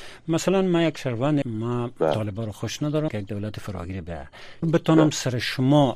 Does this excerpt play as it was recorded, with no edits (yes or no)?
no